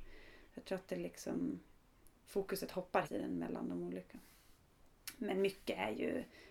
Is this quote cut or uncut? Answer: cut